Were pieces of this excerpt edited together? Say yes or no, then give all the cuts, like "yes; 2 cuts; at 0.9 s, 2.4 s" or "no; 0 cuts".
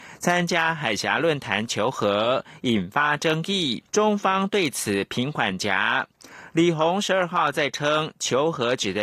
yes; 1 cut; at 3.9 s